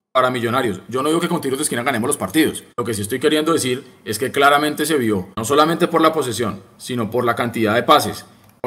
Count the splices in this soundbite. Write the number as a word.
two